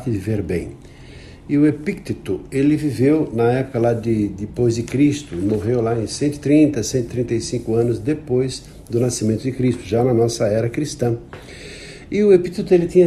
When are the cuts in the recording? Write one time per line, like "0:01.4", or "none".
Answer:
none